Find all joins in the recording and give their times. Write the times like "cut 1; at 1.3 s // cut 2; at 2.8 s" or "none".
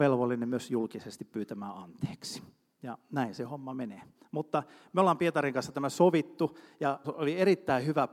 cut 1; at 7.0 s